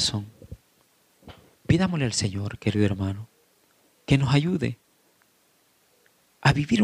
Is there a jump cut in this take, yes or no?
no